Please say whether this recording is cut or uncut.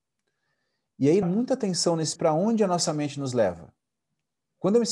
cut